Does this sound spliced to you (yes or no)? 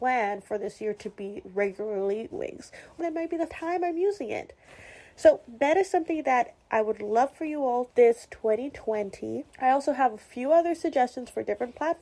yes